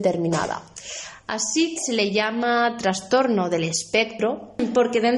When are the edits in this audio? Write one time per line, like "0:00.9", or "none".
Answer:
0:01.8